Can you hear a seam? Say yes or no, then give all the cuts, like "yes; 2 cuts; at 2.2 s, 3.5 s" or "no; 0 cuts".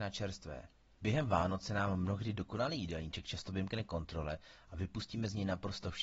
no; 0 cuts